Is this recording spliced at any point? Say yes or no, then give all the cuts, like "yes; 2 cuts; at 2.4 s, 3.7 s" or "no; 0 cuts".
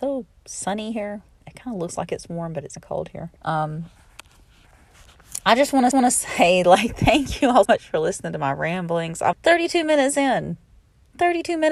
yes; 5 cuts; at 2.8 s, 3.4 s, 5.9 s, 7.7 s, 9.3 s